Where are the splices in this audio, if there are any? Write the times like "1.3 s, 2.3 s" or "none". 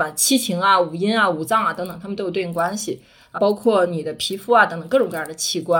3.4 s